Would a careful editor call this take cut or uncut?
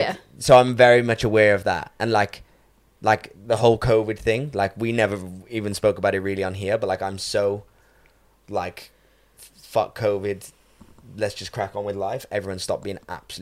uncut